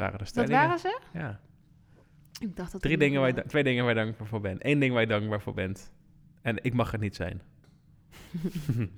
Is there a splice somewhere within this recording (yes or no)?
no